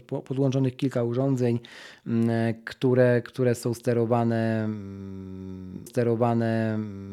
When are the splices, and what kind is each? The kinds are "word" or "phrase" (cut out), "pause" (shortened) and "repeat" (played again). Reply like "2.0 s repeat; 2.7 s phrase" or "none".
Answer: 5.9 s repeat